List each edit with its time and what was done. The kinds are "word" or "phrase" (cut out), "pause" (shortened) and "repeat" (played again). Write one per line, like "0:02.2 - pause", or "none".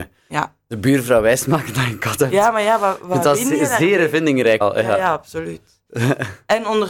0:04.6 - word